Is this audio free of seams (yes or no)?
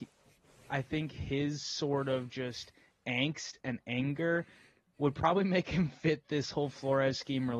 yes